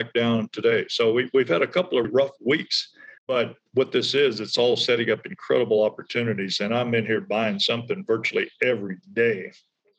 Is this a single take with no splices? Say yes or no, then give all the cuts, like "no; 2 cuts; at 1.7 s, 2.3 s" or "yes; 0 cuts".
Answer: no; 2 cuts; at 2.0 s, 3.2 s